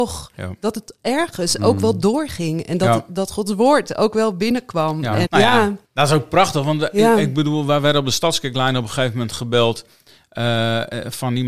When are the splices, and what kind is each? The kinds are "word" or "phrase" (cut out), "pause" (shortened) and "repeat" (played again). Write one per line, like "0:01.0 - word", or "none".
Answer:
0:05.3 - word
0:05.8 - pause